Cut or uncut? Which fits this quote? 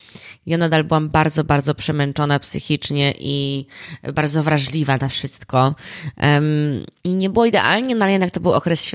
cut